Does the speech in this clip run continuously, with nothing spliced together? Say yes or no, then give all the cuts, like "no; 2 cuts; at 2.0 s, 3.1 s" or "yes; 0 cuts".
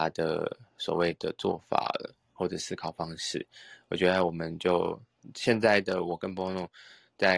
yes; 0 cuts